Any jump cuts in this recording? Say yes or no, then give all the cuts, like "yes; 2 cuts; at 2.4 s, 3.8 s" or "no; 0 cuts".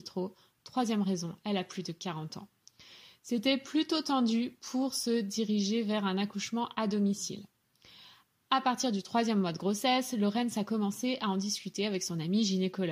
no; 0 cuts